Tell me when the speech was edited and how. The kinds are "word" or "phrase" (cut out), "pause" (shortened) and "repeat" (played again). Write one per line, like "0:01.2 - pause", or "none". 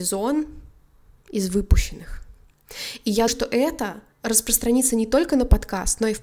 0:03.3 - word
0:04.1 - pause